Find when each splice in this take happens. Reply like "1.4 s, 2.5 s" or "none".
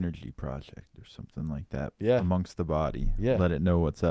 none